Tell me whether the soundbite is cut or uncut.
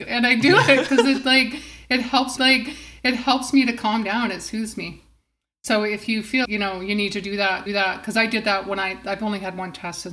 cut